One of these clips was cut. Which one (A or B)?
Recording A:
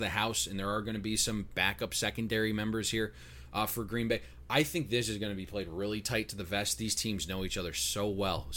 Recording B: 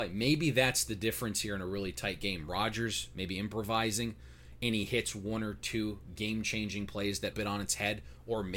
B